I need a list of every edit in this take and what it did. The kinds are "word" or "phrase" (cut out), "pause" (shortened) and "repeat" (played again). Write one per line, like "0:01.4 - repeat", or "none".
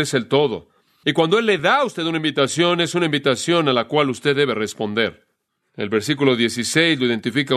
none